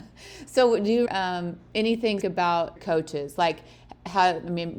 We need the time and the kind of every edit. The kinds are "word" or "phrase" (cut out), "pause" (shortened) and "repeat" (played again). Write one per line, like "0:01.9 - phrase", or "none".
0:01.1 - word
0:02.2 - word
0:02.8 - word